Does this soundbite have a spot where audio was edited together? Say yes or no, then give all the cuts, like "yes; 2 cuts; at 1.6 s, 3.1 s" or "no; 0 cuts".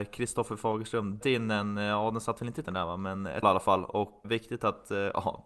yes; 4 cuts; at 1.2 s, 2.6 s, 3.4 s, 4.2 s